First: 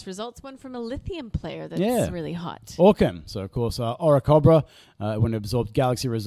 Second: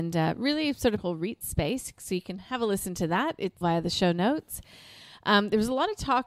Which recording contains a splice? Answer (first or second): second